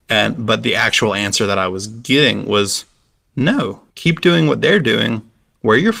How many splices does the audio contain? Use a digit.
1